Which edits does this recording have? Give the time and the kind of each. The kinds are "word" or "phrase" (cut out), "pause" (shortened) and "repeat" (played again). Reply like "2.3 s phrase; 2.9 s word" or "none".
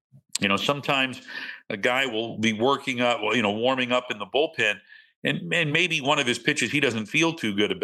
none